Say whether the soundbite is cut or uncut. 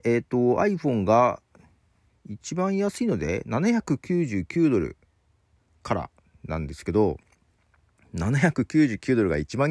uncut